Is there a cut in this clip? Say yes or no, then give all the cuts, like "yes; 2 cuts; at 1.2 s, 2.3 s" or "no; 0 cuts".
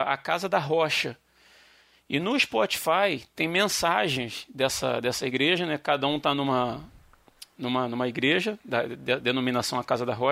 yes; 1 cut; at 9.2 s